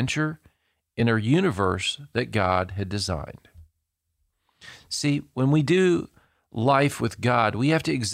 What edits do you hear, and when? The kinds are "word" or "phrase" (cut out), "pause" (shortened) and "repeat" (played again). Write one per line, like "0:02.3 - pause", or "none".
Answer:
none